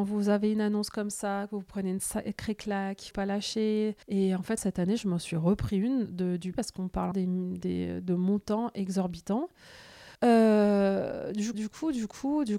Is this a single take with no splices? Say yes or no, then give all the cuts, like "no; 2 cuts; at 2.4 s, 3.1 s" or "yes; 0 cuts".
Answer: no; 7 cuts; at 3.1 s, 4.0 s, 4.6 s, 6.5 s, 7.1 s, 10.1 s, 11.5 s